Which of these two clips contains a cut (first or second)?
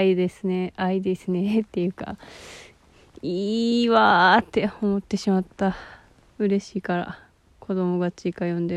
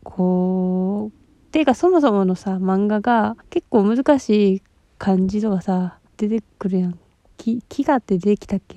second